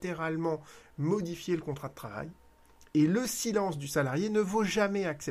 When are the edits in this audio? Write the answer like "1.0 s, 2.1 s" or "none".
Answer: none